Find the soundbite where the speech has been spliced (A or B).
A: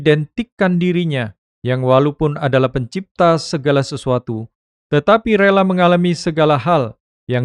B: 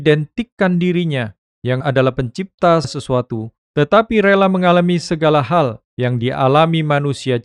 B